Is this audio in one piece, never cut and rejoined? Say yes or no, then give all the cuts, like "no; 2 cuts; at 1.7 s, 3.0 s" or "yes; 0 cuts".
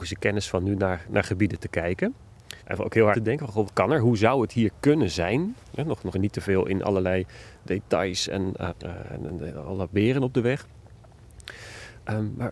no; 6 cuts; at 2.6 s, 3.1 s, 3.6 s, 5.6 s, 6.1 s, 8.7 s